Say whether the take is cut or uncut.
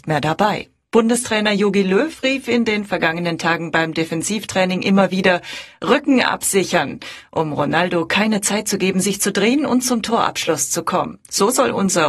uncut